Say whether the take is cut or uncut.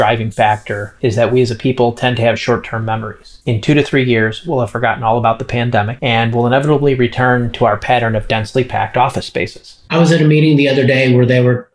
uncut